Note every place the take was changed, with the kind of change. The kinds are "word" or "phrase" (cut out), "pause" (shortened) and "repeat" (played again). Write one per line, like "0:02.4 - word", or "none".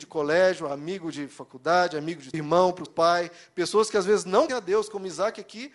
0:02.3 - phrase
0:02.9 - word
0:04.5 - word